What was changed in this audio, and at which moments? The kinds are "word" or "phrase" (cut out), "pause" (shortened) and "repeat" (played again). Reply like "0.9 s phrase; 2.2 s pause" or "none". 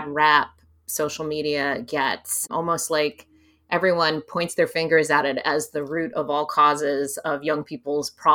none